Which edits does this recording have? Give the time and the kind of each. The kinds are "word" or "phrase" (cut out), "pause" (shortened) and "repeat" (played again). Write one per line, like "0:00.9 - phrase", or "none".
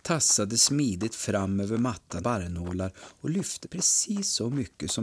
0:02.2 - word
0:03.6 - word